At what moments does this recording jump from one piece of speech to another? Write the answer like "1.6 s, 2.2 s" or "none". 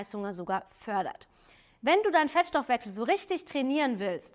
none